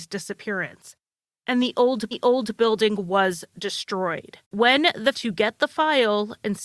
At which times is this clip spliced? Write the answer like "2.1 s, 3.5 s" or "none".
2.1 s, 4.4 s, 5.1 s